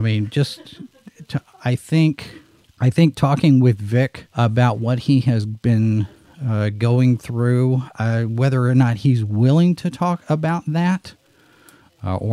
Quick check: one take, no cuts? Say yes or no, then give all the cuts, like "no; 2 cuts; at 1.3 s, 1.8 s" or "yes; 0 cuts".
no; 2 cuts; at 2.6 s, 4.3 s